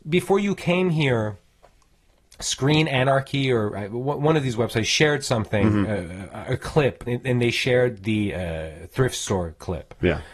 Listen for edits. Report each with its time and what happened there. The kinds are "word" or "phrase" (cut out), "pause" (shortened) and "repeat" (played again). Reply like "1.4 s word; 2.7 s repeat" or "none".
7.1 s word

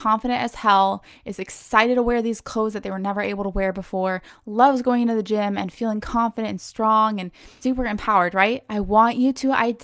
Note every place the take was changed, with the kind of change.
7.6 s word

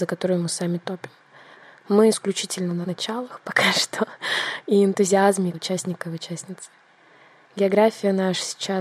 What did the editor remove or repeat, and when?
2.1 s word; 2.8 s word; 5.5 s word

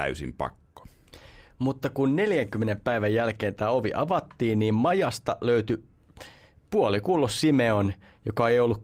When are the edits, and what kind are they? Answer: none

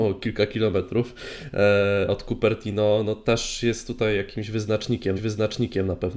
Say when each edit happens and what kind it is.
5.2 s repeat

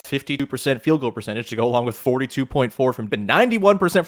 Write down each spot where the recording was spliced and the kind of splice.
3.1 s word

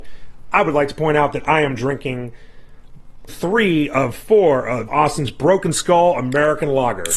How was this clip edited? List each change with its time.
3.3 s word; 4.9 s word

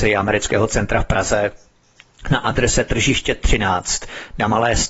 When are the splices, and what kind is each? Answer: none

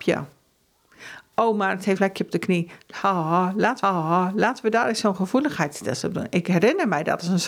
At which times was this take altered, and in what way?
2.0 s word; 3.8 s repeat

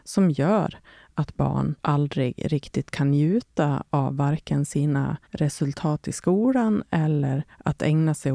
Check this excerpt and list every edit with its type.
1.8 s pause; 5.2 s pause

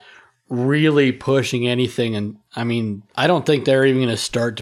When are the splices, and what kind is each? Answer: 3.1 s pause

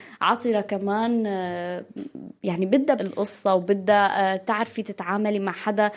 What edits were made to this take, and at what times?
2.4 s pause; 3.0 s word

